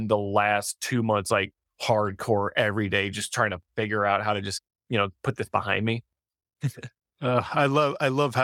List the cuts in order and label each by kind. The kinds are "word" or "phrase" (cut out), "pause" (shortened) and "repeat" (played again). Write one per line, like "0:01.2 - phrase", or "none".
none